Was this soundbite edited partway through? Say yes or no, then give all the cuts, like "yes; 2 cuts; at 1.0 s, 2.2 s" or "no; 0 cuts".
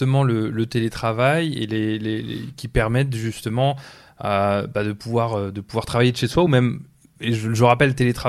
no; 0 cuts